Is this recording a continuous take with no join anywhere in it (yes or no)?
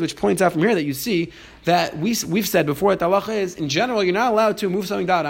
yes